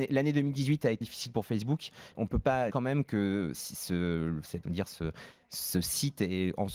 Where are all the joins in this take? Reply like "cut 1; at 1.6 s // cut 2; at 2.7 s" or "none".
cut 1; at 1.0 s // cut 2; at 2.1 s // cut 3; at 2.7 s // cut 4; at 3.5 s // cut 5; at 4.6 s